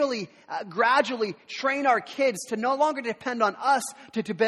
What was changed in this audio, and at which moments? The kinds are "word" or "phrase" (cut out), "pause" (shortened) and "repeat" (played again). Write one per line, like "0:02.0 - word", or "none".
none